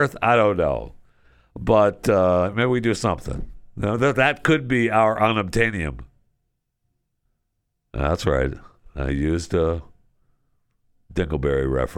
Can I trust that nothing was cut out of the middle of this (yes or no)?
yes